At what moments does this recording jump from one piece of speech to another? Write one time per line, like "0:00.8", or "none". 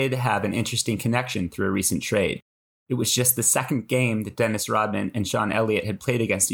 none